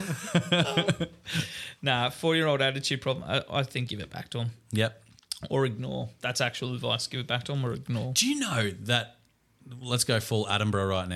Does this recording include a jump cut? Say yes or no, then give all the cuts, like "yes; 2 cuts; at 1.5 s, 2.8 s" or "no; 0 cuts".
yes; 1 cut; at 3.9 s